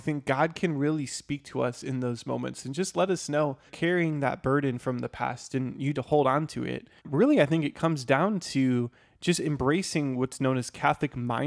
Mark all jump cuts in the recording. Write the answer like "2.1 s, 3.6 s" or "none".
3.7 s, 5.9 s, 7.0 s